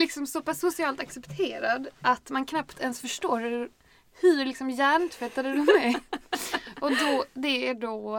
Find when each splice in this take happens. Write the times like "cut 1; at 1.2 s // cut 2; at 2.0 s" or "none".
none

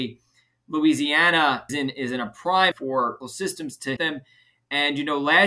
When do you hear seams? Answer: cut 1; at 1.7 s // cut 2; at 2.7 s // cut 3; at 3.2 s // cut 4; at 4.0 s

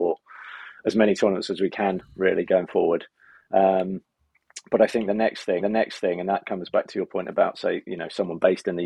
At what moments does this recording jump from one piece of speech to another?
cut 1; at 5.6 s

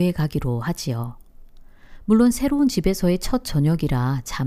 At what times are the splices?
none

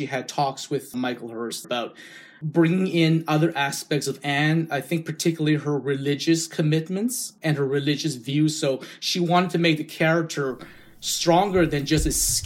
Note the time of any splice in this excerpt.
cut 1; at 1.6 s

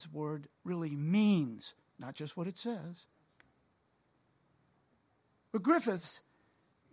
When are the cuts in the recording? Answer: none

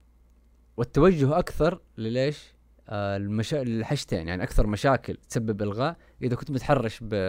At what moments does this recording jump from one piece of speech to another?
cut 1; at 2.7 s // cut 2; at 5.2 s

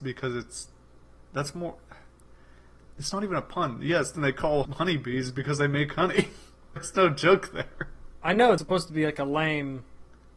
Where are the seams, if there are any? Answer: cut 1; at 4.1 s // cut 2; at 4.6 s // cut 3; at 6.8 s // cut 4; at 8.6 s

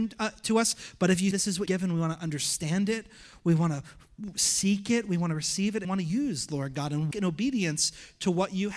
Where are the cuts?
cut 1; at 1.3 s // cut 2; at 1.7 s // cut 3; at 5.8 s // cut 4; at 7.1 s

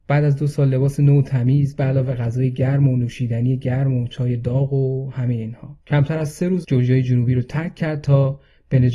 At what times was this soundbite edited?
cut 1; at 5.8 s // cut 2; at 6.6 s

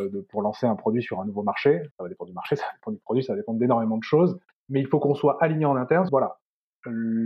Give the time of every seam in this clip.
cut 1; at 1.9 s // cut 2; at 4.5 s // cut 3; at 6.1 s

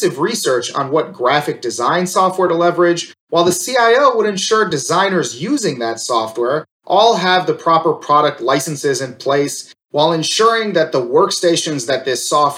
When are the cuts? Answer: none

